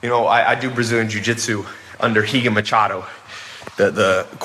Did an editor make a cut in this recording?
yes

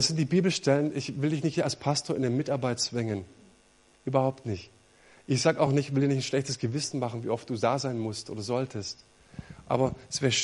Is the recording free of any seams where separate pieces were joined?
yes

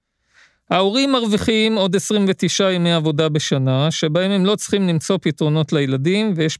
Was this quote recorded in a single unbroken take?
yes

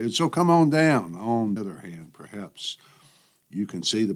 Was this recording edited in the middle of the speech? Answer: yes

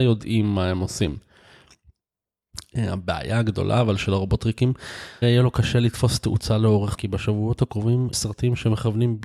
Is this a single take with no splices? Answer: no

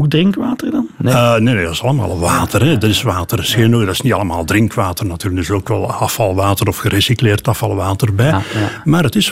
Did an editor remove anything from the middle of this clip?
no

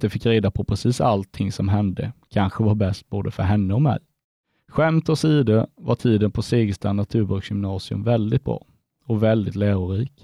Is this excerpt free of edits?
yes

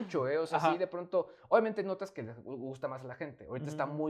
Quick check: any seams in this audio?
no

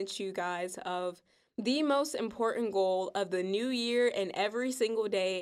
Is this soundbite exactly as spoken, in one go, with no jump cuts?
yes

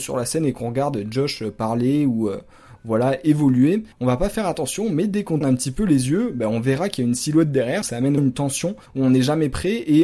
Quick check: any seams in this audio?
yes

